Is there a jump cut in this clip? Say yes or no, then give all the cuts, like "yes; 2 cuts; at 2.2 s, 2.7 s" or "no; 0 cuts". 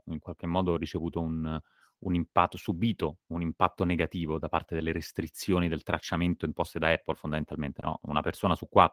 no; 0 cuts